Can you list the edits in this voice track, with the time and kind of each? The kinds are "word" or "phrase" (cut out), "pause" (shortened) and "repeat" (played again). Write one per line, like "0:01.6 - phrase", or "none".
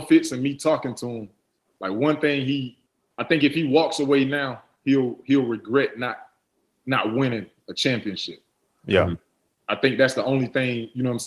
none